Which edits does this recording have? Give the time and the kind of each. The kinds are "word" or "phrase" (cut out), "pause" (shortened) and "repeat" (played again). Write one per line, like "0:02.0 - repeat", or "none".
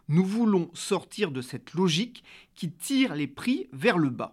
none